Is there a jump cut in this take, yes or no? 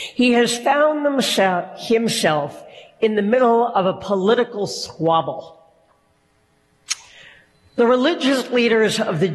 no